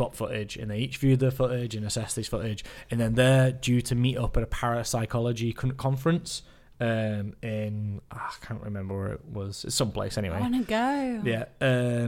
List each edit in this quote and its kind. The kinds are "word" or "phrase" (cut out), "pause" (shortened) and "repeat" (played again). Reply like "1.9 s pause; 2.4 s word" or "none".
none